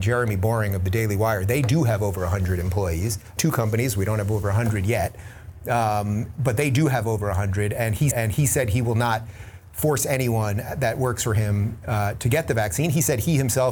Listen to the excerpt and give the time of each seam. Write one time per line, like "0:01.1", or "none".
0:03.4
0:08.1